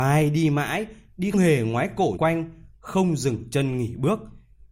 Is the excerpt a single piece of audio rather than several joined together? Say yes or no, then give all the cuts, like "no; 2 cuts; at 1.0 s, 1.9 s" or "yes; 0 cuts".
no; 2 cuts; at 1.3 s, 2.2 s